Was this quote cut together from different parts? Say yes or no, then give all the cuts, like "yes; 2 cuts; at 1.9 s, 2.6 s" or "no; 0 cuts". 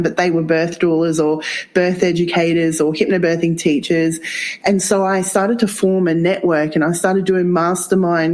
no; 0 cuts